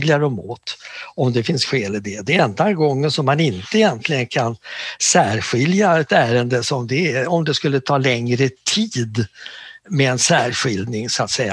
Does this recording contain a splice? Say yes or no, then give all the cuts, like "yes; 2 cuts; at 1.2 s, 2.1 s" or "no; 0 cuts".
yes; 1 cut; at 9.8 s